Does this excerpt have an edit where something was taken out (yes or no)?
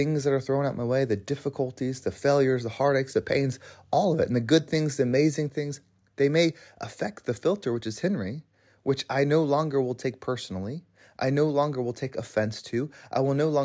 no